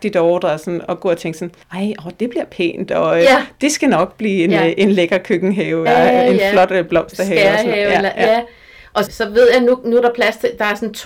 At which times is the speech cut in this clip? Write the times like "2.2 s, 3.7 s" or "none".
1.6 s, 5.9 s, 9.1 s